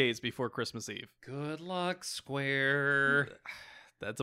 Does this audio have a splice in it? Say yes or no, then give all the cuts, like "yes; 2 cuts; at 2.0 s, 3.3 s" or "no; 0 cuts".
yes; 1 cut; at 1.2 s